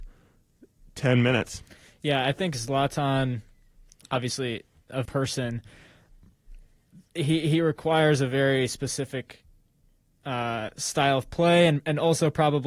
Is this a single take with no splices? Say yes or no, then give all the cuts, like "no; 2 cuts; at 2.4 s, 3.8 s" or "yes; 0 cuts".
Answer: no; 1 cut; at 5.0 s